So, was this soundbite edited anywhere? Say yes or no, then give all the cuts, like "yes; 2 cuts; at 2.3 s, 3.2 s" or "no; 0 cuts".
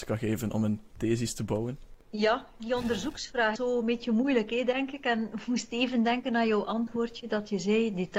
yes; 1 cut; at 3.6 s